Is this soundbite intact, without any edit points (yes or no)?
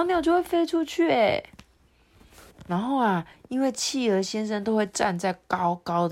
yes